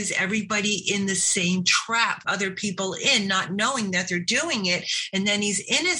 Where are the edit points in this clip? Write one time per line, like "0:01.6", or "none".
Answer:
0:02.2